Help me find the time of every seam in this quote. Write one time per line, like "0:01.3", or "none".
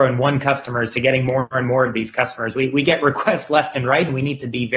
none